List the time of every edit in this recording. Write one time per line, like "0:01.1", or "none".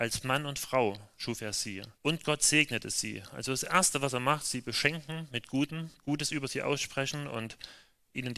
0:02.0